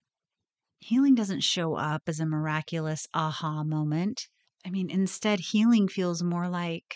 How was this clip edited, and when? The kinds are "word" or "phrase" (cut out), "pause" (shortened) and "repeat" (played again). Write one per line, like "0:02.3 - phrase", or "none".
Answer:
0:04.4 - pause